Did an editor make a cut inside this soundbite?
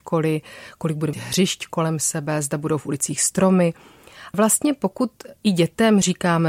yes; 3 cuts; at 1.1 s, 4.3 s, 5.4 s

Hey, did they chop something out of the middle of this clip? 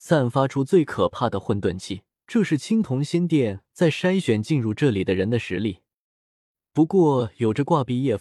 yes; 1 cut; at 2.1 s

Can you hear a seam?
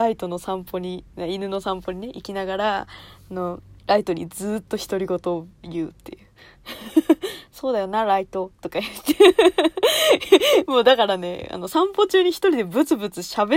yes; 2 cuts; at 3.8 s, 5.5 s

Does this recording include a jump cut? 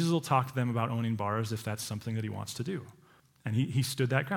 yes; 1 cut; at 3.2 s

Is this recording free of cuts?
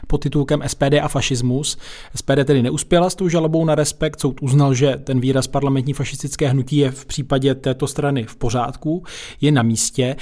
yes; 0 cuts

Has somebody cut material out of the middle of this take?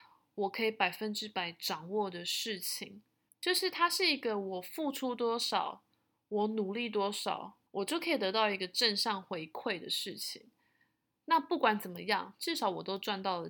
yes; 2 cuts; at 3.3 s, 7.7 s

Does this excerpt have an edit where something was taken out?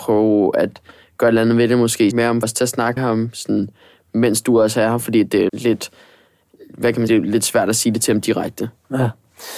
yes; 5 cuts; at 2.1 s, 2.4 s, 3.0 s, 5.5 s, 7.1 s

